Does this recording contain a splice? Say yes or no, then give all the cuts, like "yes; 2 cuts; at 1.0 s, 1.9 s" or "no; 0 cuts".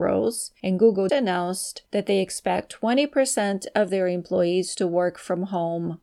yes; 1 cut; at 1.1 s